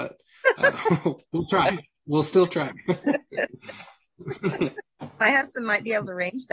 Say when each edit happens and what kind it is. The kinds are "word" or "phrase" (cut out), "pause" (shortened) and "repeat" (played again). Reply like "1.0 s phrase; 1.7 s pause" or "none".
none